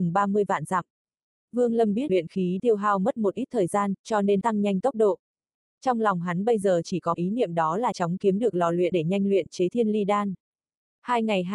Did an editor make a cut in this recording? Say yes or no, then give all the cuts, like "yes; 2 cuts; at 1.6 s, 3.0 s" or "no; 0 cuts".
yes; 6 cuts; at 2.1 s, 2.6 s, 4.4 s, 7.1 s, 7.9 s, 8.9 s